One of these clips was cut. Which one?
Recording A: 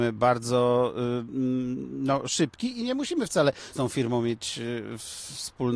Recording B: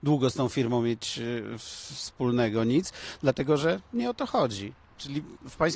A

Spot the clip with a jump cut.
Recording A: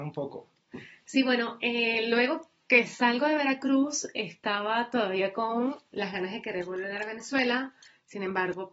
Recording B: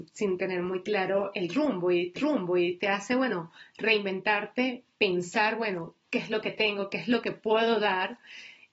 B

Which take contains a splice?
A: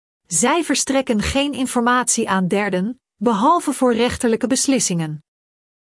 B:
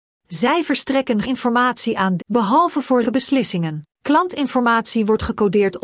B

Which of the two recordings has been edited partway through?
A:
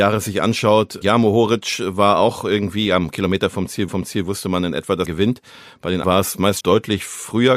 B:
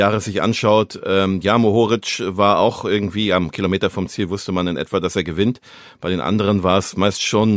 A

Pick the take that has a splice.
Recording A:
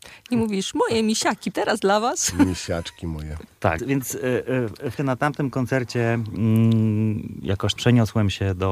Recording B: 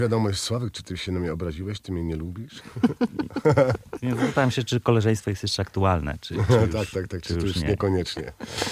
A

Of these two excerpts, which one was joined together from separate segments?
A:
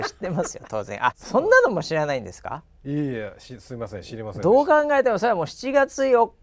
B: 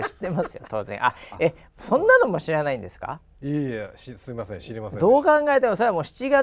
A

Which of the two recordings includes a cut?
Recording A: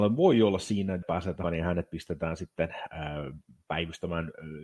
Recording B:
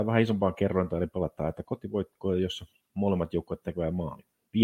A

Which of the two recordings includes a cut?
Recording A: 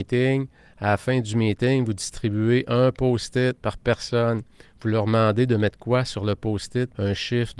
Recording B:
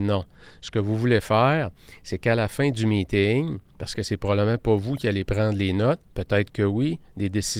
B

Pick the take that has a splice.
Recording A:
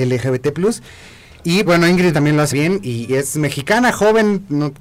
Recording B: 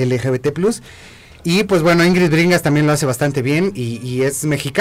A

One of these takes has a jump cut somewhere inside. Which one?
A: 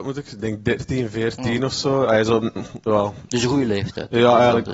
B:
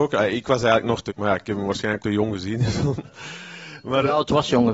B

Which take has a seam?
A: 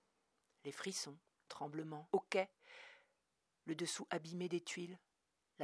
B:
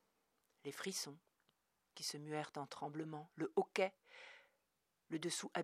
A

